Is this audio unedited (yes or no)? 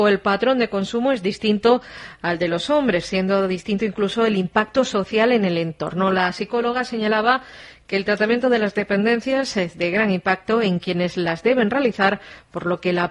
yes